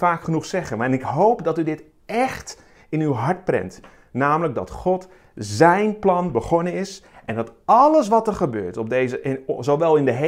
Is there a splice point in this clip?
no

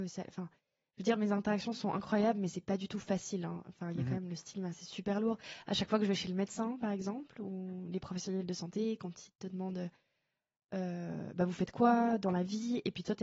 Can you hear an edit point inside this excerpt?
no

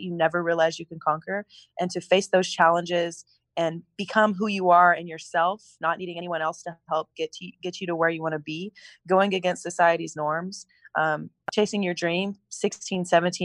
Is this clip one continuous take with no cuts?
yes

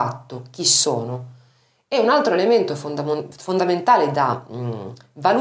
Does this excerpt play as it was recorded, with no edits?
yes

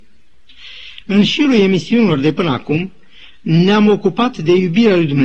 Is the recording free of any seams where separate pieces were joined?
yes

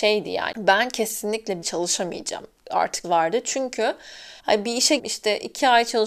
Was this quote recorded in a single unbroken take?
no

